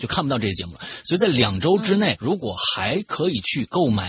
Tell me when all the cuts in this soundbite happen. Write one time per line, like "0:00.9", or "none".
0:02.2